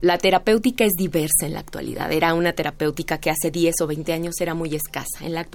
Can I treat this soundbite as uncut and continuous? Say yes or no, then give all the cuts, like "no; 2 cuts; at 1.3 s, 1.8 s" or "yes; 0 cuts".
yes; 0 cuts